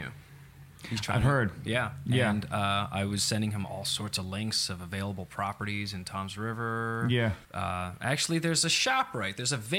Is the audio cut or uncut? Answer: cut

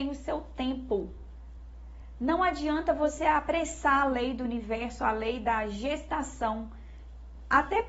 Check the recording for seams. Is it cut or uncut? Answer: uncut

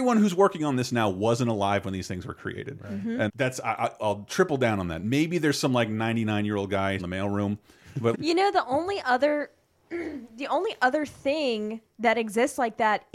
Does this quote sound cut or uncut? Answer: cut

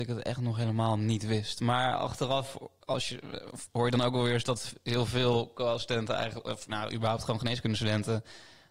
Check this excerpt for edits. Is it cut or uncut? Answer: uncut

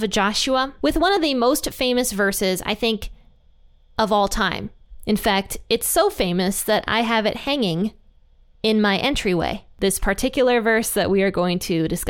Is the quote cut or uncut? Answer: uncut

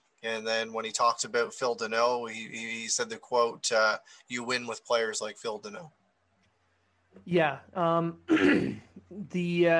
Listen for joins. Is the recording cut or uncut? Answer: uncut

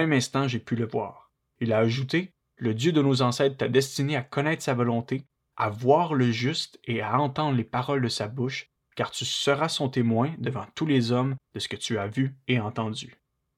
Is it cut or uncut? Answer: uncut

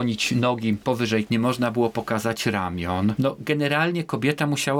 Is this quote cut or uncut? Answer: cut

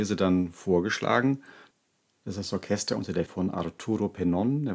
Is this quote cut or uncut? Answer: cut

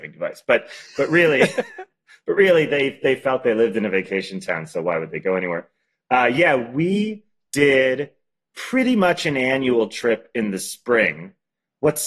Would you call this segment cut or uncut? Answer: uncut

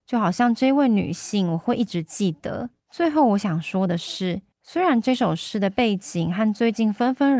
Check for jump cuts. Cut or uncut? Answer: cut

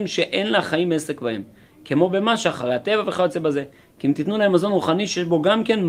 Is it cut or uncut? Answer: uncut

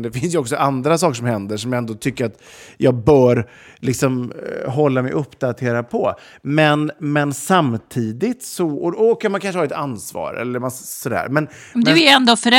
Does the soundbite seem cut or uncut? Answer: uncut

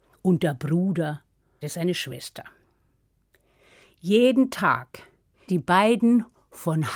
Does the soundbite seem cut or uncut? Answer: cut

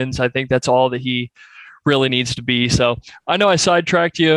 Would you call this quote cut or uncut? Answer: uncut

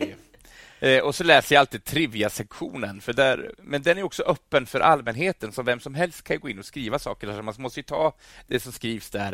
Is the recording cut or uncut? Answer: uncut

